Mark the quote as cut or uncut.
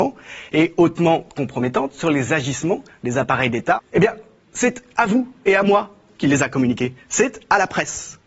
uncut